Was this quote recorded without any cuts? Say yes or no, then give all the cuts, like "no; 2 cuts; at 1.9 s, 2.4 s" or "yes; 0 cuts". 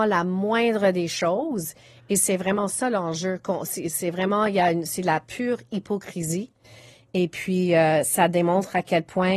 yes; 0 cuts